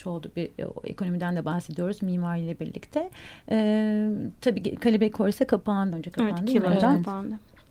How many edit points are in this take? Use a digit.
1